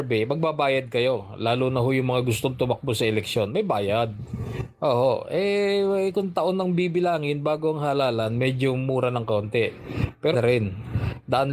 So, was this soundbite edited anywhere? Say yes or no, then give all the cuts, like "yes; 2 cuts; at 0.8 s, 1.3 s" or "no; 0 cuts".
yes; 1 cut; at 10.3 s